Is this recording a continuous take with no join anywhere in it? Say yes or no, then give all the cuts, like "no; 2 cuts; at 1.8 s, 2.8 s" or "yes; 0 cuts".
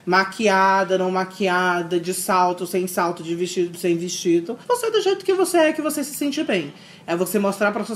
no; 1 cut; at 4.6 s